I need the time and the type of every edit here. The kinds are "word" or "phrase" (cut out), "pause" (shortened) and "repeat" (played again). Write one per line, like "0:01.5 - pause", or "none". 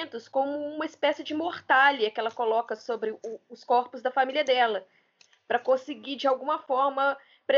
none